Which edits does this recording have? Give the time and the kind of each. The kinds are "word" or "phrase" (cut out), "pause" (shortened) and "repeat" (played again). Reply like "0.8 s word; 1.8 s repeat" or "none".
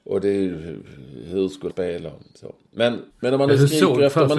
1.7 s word; 3.1 s pause